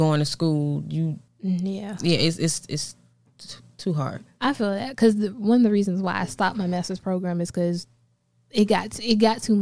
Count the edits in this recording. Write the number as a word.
one